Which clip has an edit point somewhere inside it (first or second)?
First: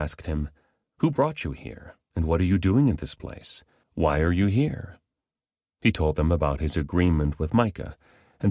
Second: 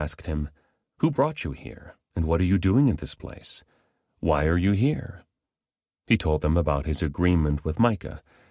first